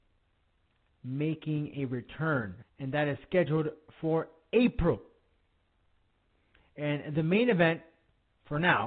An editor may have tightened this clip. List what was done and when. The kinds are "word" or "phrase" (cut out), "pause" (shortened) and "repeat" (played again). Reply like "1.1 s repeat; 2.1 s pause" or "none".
2.6 s phrase